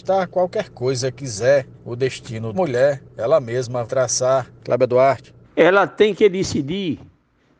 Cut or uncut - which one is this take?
cut